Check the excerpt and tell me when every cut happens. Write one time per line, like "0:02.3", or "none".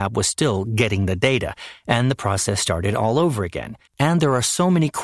0:03.9